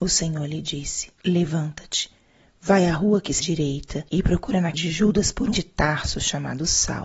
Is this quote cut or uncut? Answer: cut